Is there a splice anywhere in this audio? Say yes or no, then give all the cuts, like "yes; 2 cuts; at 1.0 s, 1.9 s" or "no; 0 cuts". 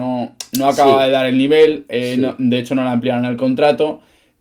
no; 0 cuts